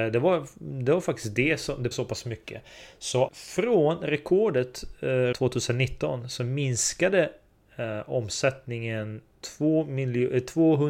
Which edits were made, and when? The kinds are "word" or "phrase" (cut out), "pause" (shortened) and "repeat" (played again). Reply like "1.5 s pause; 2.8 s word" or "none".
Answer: 1.9 s word; 3.3 s word; 5.3 s word; 9.3 s word